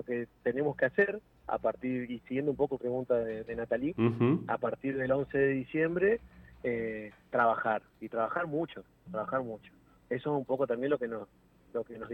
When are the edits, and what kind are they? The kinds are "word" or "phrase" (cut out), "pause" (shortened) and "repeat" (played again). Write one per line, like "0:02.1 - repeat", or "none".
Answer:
0:02.8 - phrase